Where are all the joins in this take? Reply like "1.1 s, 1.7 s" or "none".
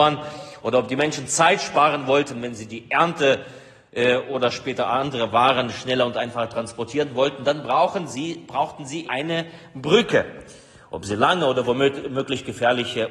9.0 s